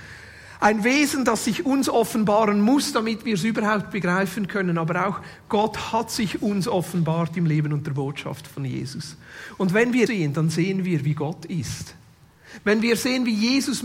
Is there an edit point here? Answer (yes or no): yes